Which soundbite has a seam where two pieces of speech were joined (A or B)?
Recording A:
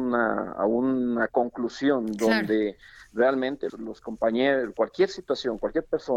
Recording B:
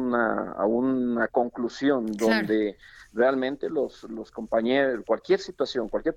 A